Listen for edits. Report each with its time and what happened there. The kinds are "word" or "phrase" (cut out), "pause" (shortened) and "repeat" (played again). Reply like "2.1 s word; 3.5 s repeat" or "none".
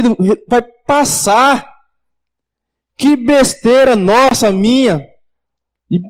none